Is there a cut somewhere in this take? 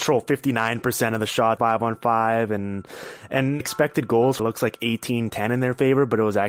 yes; 3 cuts; at 1.6 s, 3.6 s, 4.4 s

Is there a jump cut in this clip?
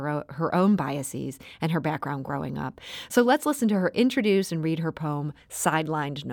no; 0 cuts

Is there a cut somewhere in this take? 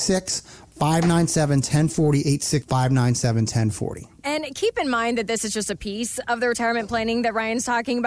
yes; 1 cut; at 2.6 s

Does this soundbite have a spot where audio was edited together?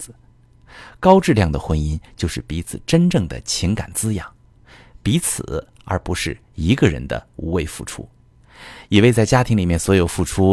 no; 0 cuts

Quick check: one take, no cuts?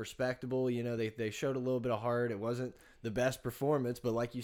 yes; 0 cuts

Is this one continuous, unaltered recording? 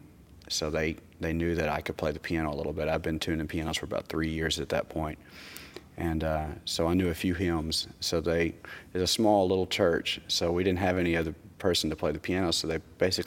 yes; 0 cuts

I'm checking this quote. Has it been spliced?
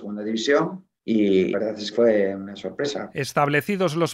yes; 2 cuts; at 1.5 s, 1.9 s

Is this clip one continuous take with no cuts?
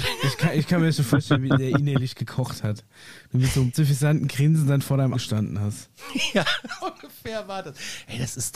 no; 3 cuts; at 3.7 s, 5.1 s, 6.8 s

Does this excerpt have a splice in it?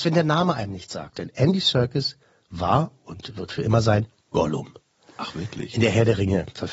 no; 0 cuts

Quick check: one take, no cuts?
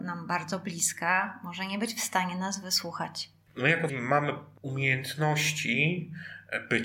no; 1 cut; at 3.9 s

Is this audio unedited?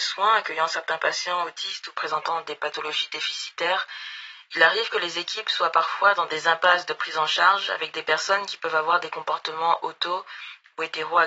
yes; 0 cuts

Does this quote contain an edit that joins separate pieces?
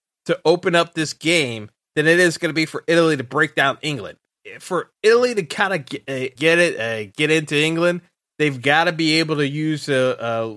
yes; 1 cut; at 6.4 s

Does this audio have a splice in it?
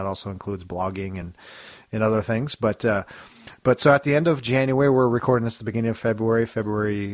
no; 0 cuts

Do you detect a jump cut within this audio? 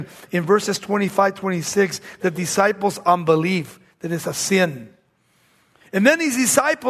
no; 0 cuts

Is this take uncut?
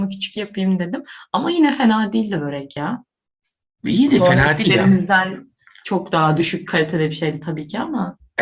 yes; 0 cuts

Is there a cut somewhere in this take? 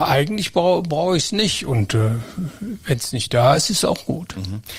no; 0 cuts

